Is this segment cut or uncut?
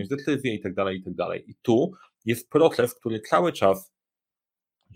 uncut